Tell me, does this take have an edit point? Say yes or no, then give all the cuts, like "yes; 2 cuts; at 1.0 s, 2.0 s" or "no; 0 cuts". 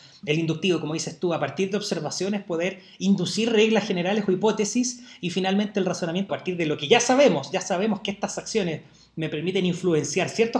yes; 1 cut; at 6.3 s